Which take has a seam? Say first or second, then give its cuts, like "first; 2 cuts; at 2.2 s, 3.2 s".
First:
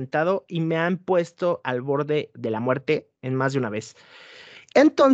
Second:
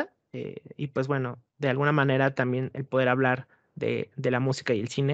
first; 1 cut; at 3.2 s